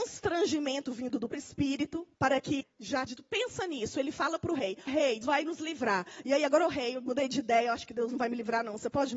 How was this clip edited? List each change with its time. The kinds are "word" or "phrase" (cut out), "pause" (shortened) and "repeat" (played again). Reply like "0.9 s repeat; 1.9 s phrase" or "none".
1.3 s word; 2.1 s pause; 2.6 s word; 3.1 s word; 4.9 s word; 5.2 s word

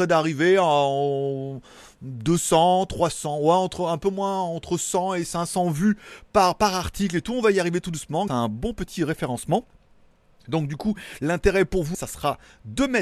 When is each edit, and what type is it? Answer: 8.3 s word; 11.9 s word

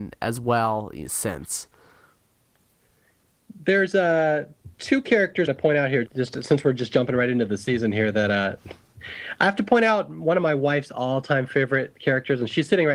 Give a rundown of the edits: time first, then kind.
5.5 s phrase; 6.1 s word

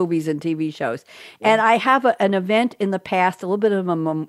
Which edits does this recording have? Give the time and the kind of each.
none

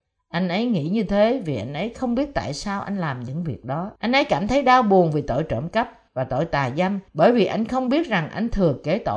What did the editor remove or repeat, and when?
4.0 s pause; 6.1 s pause; 7.1 s pause

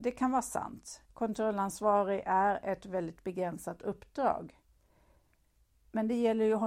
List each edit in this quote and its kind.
1.1 s pause

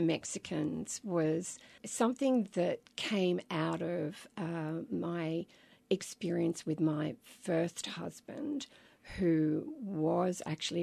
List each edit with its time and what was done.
none

